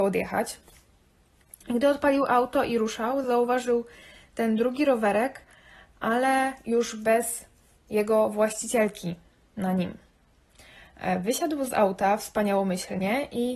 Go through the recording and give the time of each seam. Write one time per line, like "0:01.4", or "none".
none